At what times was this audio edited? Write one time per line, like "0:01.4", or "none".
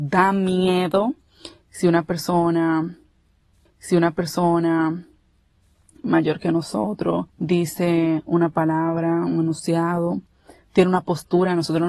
0:03.7
0:07.3